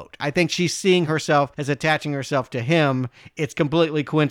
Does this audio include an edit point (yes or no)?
no